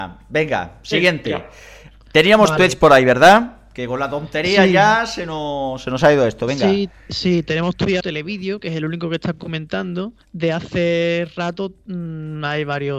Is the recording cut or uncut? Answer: cut